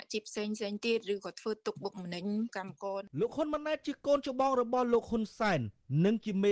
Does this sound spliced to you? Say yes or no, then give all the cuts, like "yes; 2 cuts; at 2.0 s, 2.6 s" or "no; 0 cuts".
yes; 1 cut; at 3.1 s